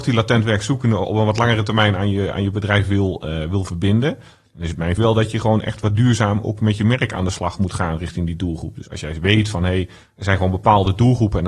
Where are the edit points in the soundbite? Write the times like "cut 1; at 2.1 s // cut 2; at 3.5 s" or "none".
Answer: cut 1; at 5.0 s